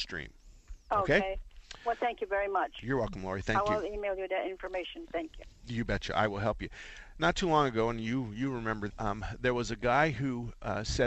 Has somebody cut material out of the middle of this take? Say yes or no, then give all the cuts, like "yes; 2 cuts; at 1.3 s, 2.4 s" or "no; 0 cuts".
yes; 1 cut; at 8.9 s